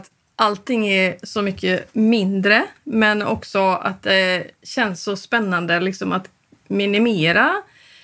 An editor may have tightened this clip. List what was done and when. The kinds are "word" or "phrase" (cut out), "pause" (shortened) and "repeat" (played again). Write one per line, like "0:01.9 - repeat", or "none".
none